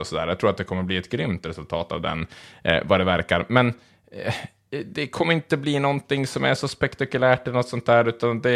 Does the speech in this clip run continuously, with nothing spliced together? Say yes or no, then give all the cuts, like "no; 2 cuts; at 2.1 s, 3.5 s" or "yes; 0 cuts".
yes; 0 cuts